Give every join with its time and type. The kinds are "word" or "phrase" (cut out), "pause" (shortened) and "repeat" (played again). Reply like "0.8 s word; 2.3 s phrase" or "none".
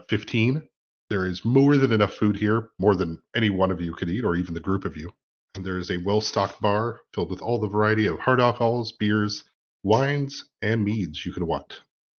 none